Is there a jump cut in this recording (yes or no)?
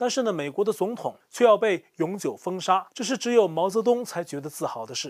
yes